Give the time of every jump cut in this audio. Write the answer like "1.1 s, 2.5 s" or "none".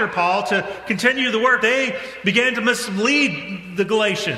1.6 s